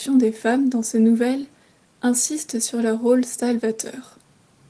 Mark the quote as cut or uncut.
uncut